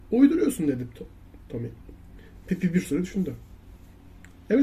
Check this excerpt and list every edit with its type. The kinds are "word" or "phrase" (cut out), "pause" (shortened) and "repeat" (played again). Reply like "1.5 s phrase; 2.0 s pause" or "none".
none